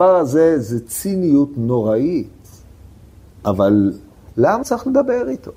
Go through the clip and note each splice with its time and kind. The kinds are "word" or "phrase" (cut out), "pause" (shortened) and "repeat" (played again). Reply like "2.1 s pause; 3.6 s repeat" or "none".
4.6 s word